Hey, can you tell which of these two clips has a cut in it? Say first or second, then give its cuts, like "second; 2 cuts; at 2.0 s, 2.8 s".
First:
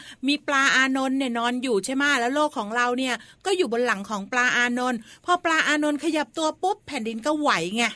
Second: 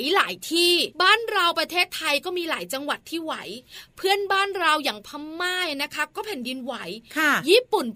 second; 1 cut; at 0.9 s